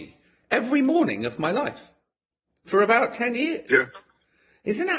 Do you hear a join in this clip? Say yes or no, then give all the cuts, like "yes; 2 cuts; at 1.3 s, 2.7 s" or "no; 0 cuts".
no; 0 cuts